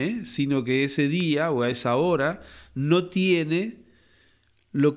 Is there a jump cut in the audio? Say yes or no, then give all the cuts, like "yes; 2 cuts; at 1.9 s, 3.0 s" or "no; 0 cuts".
no; 0 cuts